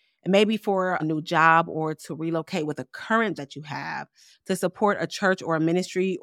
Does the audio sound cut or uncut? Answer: cut